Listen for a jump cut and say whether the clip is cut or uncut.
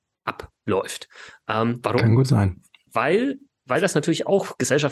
uncut